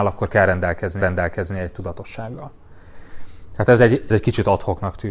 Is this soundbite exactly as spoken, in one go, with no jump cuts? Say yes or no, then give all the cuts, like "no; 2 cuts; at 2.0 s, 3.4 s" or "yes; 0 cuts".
no; 2 cuts; at 1.0 s, 4.1 s